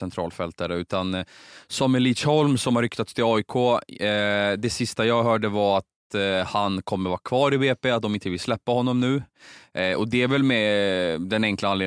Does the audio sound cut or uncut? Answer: uncut